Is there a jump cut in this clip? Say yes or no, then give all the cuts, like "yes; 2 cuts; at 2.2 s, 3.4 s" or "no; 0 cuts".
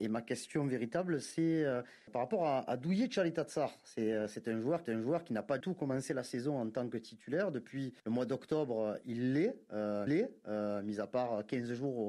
yes; 5 cuts; at 2.1 s, 4.9 s, 5.6 s, 8.0 s, 10.1 s